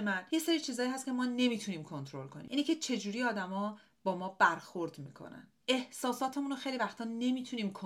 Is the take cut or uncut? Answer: cut